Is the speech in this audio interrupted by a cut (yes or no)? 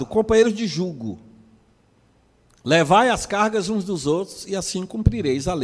no